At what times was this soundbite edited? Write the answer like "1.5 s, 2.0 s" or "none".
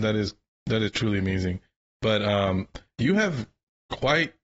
none